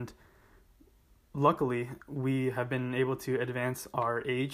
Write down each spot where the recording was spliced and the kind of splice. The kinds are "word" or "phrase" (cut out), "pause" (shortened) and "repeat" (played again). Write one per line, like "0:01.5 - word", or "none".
0:02.0 - pause